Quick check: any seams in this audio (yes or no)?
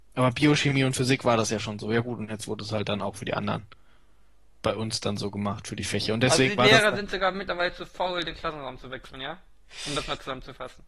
no